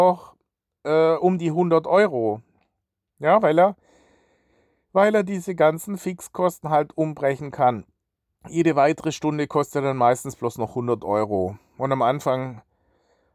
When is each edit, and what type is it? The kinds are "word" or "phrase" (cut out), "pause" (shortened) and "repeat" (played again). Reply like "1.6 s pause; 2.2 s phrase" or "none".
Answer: none